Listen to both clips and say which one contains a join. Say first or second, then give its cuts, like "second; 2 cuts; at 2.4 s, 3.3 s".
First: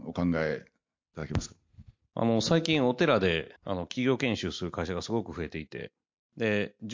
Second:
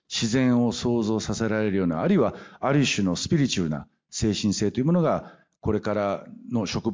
first; 1 cut; at 3.6 s